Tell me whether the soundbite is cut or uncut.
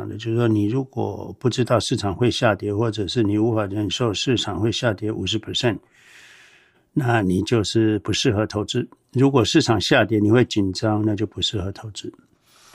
uncut